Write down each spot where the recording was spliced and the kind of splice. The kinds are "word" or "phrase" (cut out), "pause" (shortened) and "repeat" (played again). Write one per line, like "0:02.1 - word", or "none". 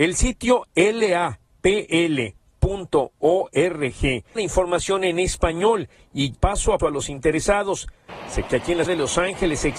0:04.4 - word
0:06.3 - word
0:06.8 - word
0:08.5 - word
0:08.9 - word